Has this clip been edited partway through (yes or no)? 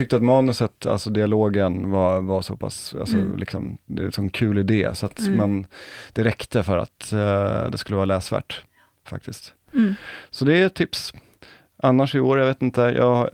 no